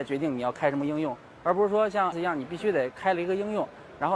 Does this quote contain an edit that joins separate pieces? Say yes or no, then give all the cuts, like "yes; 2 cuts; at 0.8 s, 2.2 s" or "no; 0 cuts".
yes; 1 cut; at 2.1 s